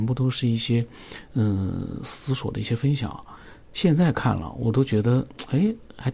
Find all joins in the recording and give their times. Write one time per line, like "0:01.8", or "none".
none